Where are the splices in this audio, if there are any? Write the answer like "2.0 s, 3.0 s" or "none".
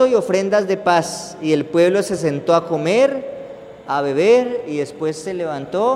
none

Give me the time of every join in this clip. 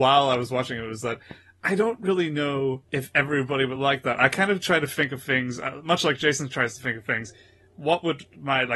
none

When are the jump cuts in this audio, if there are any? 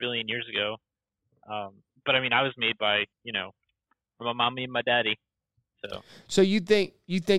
3.1 s

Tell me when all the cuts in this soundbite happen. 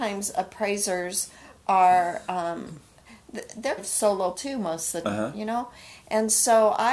3.8 s, 4.3 s, 5.0 s

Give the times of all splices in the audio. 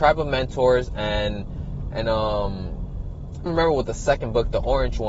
3.5 s

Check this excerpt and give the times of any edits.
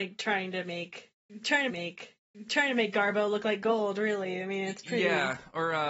1.7 s

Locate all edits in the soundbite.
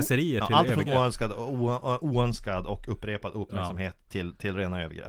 none

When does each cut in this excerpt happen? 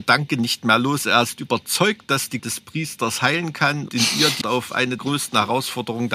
2.4 s, 3.9 s, 4.4 s, 5.0 s

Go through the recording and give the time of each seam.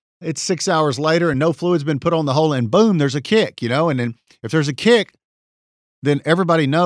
none

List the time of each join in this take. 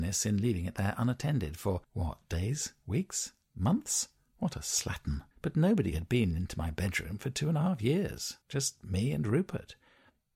1.8 s, 5.3 s, 8.4 s

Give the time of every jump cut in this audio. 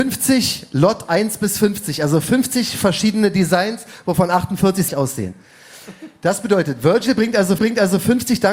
4.9 s, 7.6 s

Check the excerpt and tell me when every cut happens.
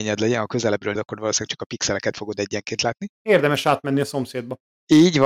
0.9 s, 3.1 s

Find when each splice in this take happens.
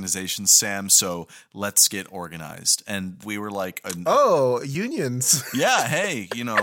3.2 s

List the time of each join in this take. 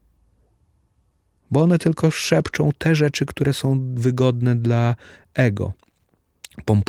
none

